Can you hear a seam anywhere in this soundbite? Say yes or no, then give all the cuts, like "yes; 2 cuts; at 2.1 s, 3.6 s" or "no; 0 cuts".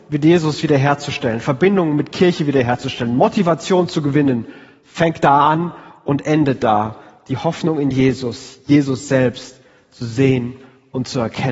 no; 0 cuts